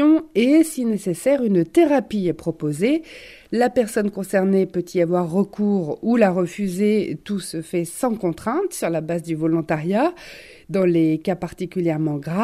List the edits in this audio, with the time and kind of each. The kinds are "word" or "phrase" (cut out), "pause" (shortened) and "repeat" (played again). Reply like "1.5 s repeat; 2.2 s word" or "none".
none